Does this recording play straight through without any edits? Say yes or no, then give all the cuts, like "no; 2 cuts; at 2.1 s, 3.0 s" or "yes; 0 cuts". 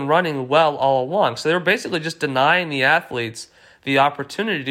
yes; 0 cuts